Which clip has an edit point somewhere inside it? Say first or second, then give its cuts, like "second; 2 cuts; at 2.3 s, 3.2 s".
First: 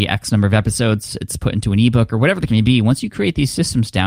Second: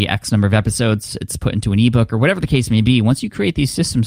first; 1 cut; at 2.5 s